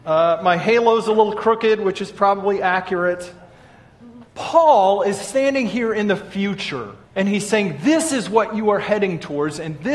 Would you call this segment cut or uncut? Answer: cut